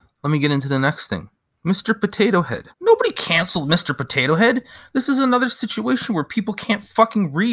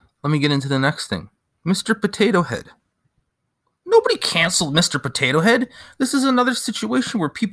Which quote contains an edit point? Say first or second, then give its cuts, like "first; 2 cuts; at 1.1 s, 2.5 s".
first; 1 cut; at 2.7 s